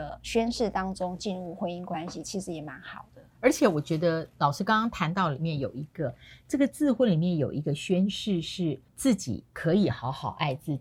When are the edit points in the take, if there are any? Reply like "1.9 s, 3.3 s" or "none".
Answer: 8.9 s, 9.5 s